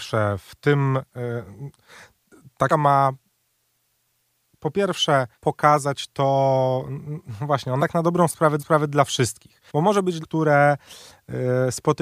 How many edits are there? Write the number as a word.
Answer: six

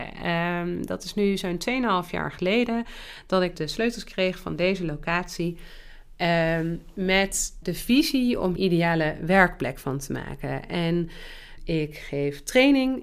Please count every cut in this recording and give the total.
four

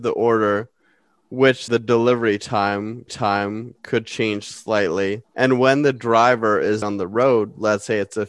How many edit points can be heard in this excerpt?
four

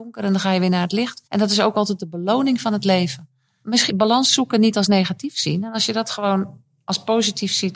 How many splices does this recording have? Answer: two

